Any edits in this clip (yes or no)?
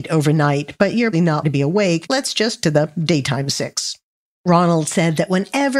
yes